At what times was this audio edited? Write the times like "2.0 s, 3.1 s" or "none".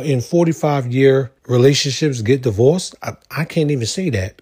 1.4 s